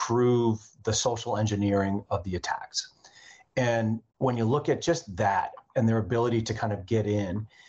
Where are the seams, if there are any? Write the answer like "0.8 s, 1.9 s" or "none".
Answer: 4.1 s